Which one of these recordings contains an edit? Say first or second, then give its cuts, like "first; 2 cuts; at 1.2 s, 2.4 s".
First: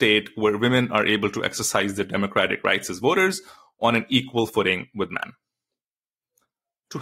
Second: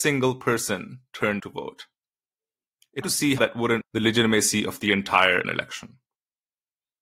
second; 5 cuts; at 1.4 s, 3.0 s, 3.4 s, 3.8 s, 5.4 s